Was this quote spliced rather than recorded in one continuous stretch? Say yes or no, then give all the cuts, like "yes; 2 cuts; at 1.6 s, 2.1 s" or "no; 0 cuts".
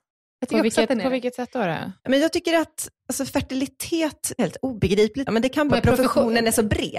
yes; 5 cuts; at 2.0 s, 3.0 s, 4.4 s, 5.3 s, 5.7 s